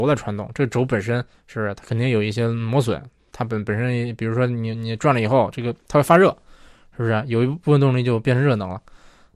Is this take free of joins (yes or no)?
yes